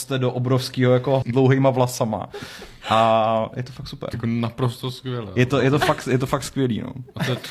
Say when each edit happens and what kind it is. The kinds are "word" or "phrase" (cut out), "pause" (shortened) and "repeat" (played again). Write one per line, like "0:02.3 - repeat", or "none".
0:01.2 - phrase
0:04.1 - word